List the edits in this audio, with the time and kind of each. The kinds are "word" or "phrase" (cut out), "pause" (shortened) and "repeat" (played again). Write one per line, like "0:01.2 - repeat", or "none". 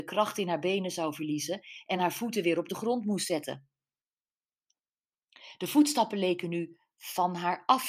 none